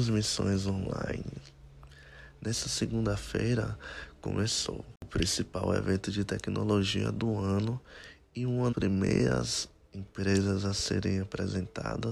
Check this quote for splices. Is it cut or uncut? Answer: cut